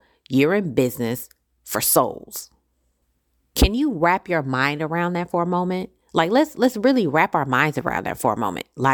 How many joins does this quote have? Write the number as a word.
zero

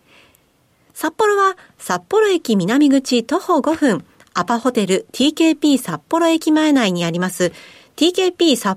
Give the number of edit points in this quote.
zero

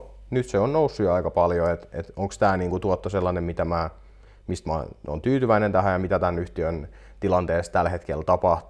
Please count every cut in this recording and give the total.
zero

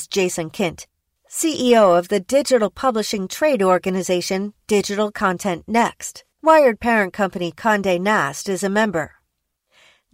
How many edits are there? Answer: one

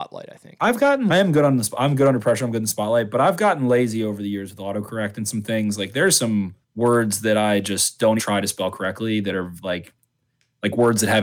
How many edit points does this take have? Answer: three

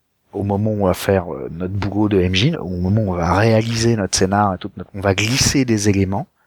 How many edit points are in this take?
two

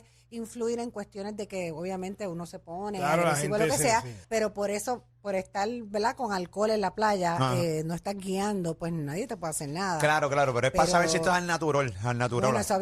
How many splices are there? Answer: one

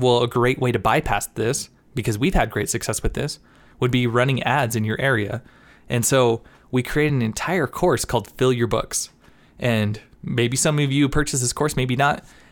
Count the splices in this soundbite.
zero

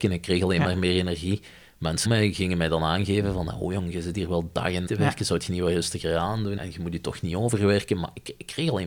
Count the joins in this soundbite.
three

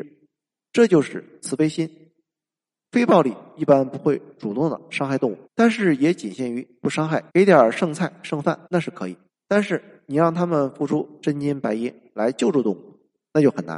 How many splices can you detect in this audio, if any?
four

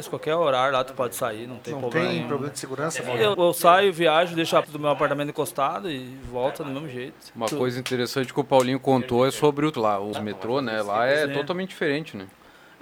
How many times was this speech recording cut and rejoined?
four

